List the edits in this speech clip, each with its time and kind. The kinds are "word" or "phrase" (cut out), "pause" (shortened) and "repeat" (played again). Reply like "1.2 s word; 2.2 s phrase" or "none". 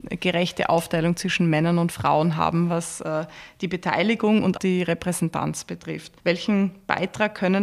4.5 s word; 6.2 s pause